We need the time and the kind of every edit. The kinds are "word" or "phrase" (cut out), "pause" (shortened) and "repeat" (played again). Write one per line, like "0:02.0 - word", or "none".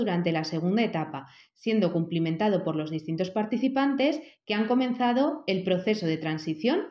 none